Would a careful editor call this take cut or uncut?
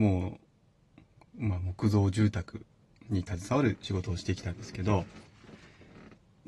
uncut